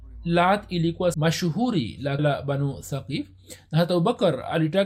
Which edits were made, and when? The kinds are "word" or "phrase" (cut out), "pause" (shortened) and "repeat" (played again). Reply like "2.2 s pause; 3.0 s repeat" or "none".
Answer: 1.1 s word; 2.2 s word